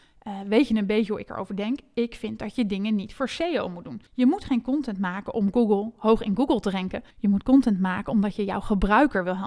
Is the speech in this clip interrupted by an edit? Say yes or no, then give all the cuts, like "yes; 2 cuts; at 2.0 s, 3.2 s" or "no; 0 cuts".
yes; 2 cuts; at 4.1 s, 7.1 s